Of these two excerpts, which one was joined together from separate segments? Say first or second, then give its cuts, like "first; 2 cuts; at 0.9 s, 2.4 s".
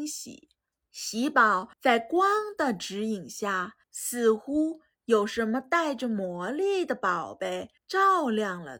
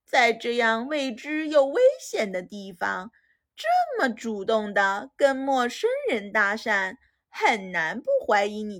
first; 3 cuts; at 1.7 s, 3.8 s, 7.8 s